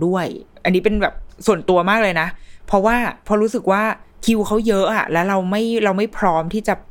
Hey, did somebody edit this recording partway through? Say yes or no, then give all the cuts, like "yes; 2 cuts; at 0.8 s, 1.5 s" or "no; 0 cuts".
yes; 1 cut; at 4.1 s